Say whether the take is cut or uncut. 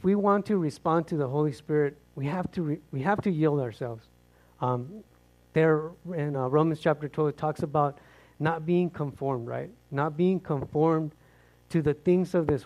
uncut